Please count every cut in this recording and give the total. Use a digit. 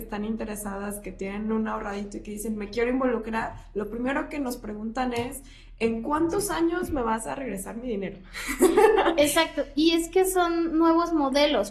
0